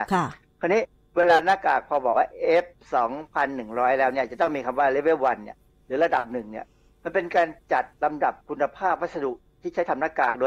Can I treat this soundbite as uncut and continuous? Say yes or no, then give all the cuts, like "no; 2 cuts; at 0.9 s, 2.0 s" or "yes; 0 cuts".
yes; 0 cuts